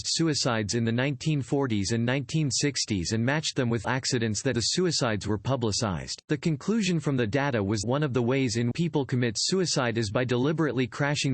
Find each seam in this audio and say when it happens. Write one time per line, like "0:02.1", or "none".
0:03.8
0:04.5
0:06.2
0:07.8
0:08.7